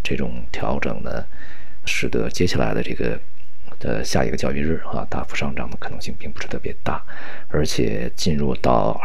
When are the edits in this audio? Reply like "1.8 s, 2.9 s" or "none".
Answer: 1.9 s